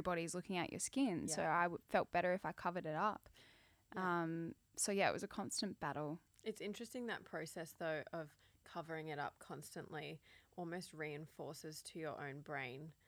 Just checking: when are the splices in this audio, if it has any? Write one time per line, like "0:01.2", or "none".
none